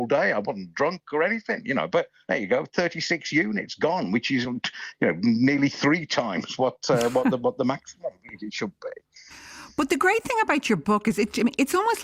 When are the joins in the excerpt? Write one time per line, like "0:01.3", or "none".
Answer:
none